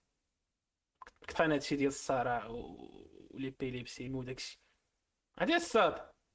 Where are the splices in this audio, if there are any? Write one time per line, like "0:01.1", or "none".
0:01.3
0:04.1